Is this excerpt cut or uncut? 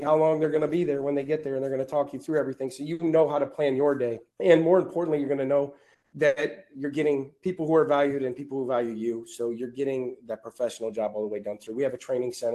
cut